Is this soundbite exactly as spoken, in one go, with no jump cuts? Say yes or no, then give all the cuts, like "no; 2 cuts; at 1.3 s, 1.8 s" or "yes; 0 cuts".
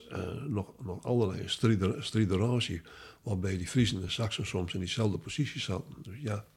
yes; 0 cuts